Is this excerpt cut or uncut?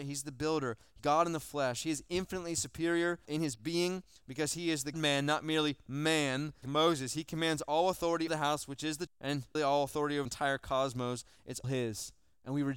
cut